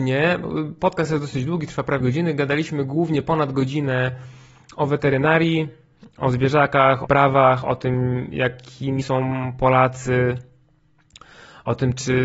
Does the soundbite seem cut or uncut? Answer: cut